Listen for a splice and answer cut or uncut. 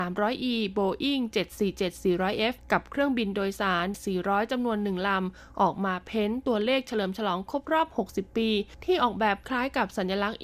cut